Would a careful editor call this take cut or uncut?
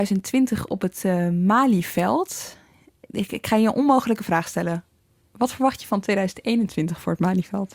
uncut